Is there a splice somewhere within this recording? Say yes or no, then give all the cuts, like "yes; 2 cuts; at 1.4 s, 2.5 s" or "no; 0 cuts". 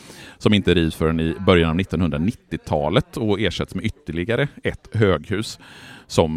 no; 0 cuts